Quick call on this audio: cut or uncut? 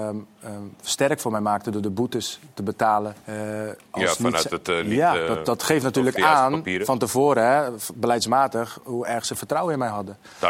cut